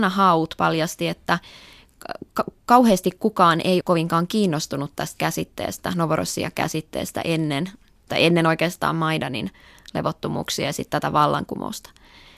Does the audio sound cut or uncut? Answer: cut